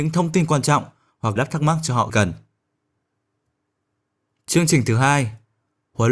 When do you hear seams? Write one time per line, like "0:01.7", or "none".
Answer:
0:01.4
0:02.1